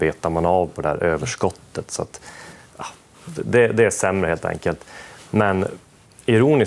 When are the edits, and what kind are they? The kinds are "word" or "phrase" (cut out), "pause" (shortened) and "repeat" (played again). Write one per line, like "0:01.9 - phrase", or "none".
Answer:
none